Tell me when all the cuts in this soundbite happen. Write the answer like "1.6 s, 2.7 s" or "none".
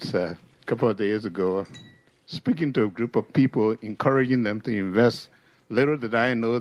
none